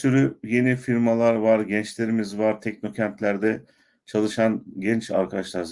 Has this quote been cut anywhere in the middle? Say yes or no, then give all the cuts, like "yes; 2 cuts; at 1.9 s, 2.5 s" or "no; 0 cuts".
no; 0 cuts